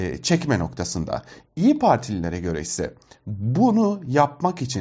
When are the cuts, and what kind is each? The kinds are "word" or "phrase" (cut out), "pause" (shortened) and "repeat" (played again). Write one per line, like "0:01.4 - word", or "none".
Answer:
none